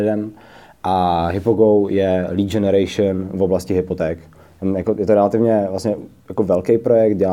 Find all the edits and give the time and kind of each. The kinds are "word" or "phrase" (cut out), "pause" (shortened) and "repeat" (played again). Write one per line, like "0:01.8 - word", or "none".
none